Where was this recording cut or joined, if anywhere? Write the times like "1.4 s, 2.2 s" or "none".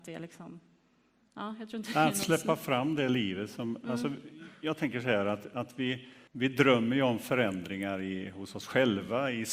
6.3 s